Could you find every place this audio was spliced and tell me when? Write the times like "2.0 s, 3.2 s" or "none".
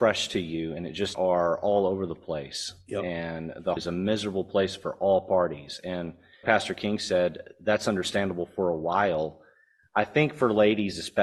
1.1 s, 3.8 s, 6.4 s